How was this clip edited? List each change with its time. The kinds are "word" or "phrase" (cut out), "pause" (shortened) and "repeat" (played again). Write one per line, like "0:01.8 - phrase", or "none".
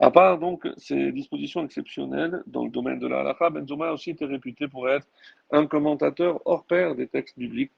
none

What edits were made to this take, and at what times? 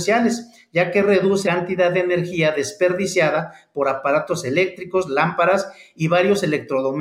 0:01.4 - word

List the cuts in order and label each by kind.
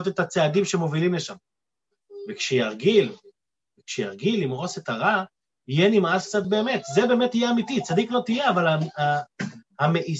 none

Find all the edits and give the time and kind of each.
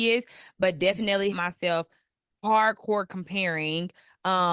0:01.3 - phrase

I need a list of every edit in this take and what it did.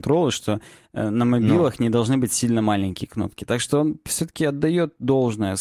none

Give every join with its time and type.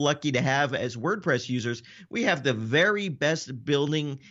none

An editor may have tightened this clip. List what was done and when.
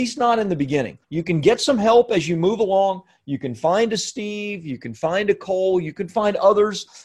0:01.0 - pause

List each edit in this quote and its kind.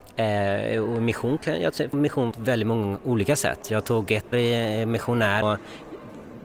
0:01.9 - phrase
0:02.3 - word
0:04.3 - word
0:05.4 - word

